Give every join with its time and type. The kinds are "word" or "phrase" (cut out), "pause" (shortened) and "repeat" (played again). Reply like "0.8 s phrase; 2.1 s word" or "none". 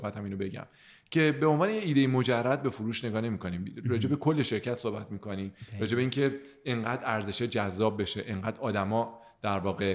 none